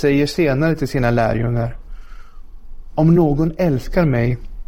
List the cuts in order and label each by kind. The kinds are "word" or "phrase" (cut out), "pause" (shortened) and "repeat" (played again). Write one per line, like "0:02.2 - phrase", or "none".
none